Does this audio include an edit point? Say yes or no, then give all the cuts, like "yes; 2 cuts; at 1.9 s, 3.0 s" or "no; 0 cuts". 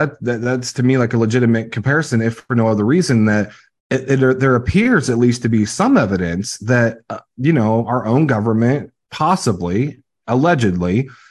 no; 0 cuts